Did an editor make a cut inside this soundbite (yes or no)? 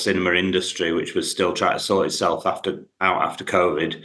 no